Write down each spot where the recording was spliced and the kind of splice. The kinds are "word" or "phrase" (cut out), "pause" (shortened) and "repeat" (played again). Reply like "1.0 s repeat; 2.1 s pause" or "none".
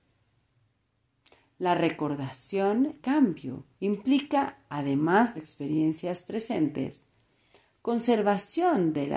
3.0 s word; 3.7 s pause; 5.3 s phrase